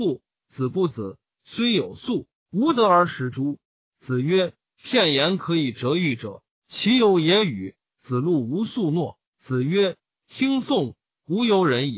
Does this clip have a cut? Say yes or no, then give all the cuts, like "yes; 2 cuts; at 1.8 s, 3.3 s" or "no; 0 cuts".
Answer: yes; 2 cuts; at 3.6 s, 9.3 s